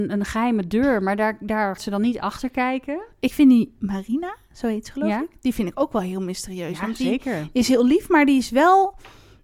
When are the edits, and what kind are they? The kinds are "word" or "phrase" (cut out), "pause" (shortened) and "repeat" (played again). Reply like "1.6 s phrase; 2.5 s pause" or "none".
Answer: 1.8 s word